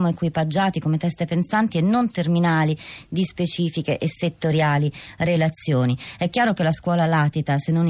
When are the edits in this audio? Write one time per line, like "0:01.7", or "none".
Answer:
none